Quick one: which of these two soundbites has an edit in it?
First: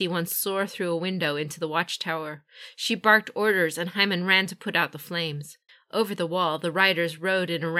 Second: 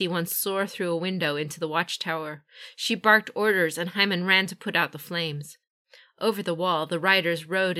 first; 1 cut; at 5.7 s

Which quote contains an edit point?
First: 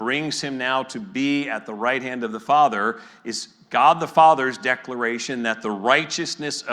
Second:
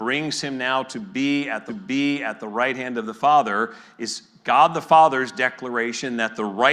second; 1 cut; at 1.7 s

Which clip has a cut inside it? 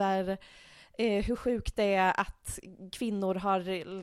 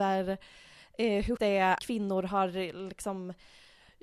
second; 2 cuts; at 1.4 s, 1.8 s

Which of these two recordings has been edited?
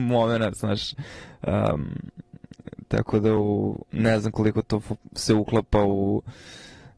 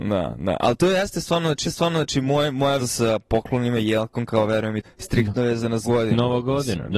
second; 4 cuts; at 1.6 s, 2.8 s, 4.8 s, 5.8 s

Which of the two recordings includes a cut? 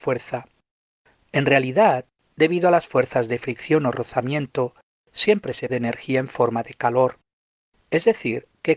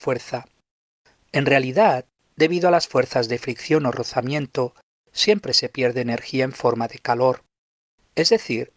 first; 1 cut; at 5.7 s

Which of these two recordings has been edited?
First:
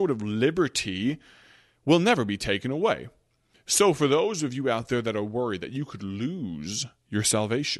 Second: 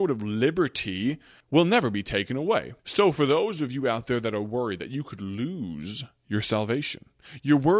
second; 2 cuts; at 1.4 s, 2.8 s

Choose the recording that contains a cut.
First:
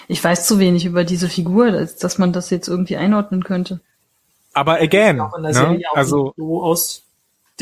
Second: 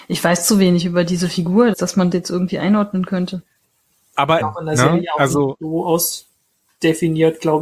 second; 3 cuts; at 1.7 s, 2.1 s, 4.4 s

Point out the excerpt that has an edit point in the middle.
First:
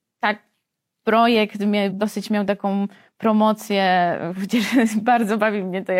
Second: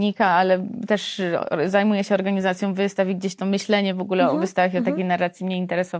first; 1 cut; at 1.9 s

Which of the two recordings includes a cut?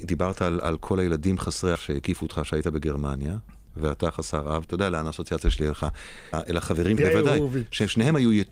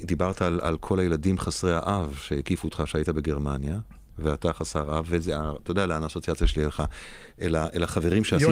first; 4 cuts; at 1.7 s, 4.6 s, 6.3 s, 7.0 s

